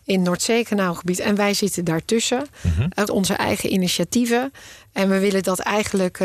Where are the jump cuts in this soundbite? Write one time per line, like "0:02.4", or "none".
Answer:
0:03.1